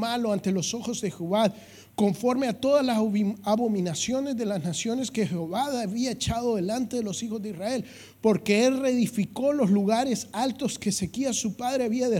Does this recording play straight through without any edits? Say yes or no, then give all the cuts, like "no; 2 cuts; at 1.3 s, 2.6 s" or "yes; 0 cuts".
yes; 0 cuts